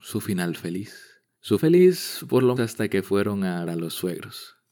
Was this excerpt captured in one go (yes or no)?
no